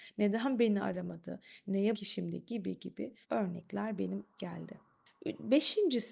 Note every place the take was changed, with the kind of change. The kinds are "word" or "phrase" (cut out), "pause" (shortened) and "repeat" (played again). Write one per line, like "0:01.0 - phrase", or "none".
0:01.9 - word
0:03.2 - pause
0:04.3 - word